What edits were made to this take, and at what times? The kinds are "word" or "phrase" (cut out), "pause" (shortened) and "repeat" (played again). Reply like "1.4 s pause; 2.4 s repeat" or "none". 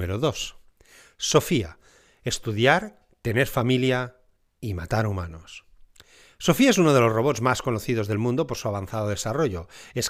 none